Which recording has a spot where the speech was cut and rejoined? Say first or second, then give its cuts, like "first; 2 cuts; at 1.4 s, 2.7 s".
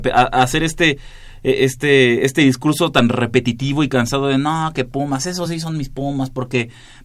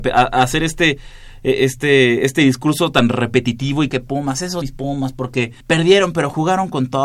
second; 3 cuts; at 3.9 s, 4.6 s, 5.6 s